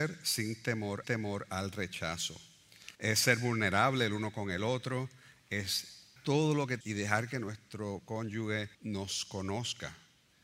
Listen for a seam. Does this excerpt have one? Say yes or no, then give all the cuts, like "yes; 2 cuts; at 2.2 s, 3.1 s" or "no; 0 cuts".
yes; 5 cuts; at 1.0 s, 2.9 s, 6.2 s, 6.8 s, 8.7 s